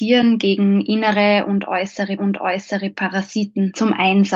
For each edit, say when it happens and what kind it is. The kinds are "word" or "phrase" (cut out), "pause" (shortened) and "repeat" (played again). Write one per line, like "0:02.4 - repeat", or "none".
0:02.2 - repeat